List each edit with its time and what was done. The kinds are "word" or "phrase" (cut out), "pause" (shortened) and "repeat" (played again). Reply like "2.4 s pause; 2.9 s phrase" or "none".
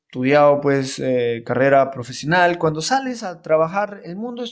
none